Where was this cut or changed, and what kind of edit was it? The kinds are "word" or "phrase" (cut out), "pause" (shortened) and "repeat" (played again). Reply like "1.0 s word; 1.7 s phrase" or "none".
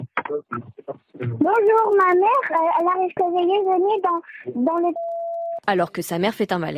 3.2 s phrase